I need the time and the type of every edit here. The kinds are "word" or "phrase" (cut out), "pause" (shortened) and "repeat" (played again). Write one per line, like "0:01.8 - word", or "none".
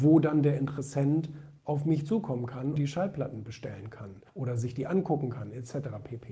0:01.6 - pause
0:02.8 - word
0:04.3 - pause